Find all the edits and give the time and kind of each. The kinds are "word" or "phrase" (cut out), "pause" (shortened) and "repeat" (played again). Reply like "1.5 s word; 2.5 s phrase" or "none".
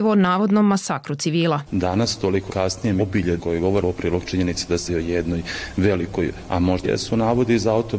1.7 s word; 2.5 s word; 3.0 s word; 3.4 s word; 3.8 s word; 4.9 s word; 6.5 s word; 6.8 s word